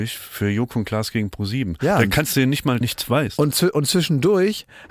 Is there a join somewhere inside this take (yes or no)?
yes